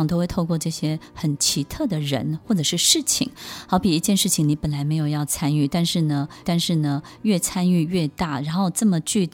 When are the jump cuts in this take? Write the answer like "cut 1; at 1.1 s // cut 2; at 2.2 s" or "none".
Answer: cut 1; at 6.4 s